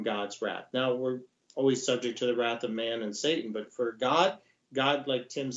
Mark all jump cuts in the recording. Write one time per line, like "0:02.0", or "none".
none